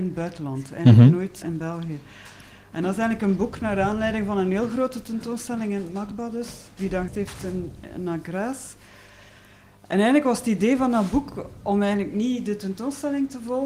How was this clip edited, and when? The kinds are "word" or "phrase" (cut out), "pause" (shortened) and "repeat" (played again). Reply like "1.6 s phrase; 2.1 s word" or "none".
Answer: 1.4 s word; 7.1 s word